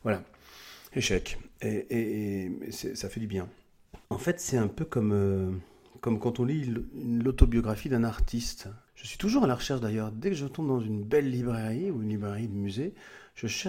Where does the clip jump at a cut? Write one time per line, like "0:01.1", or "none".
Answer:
0:04.0
0:08.9